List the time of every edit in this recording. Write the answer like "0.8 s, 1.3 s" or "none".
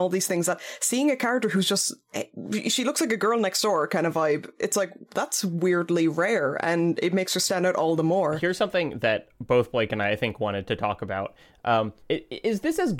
12.0 s